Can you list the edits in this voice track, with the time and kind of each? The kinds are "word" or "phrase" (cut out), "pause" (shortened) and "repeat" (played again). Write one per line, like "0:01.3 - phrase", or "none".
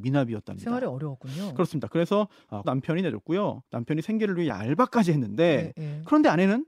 0:02.6 - phrase
0:03.7 - pause
0:04.5 - word